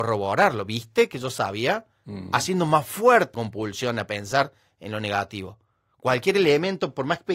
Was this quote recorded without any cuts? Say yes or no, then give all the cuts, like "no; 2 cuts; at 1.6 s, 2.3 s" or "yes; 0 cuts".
no; 1 cut; at 3.3 s